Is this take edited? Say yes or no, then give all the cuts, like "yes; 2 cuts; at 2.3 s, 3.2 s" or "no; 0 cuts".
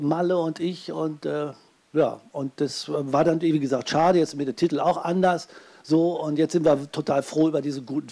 no; 0 cuts